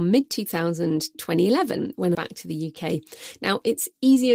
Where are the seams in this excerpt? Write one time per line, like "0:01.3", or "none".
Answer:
0:01.1
0:02.1